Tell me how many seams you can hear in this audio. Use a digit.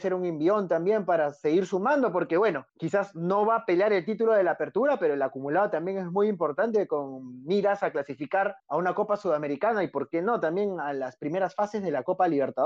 2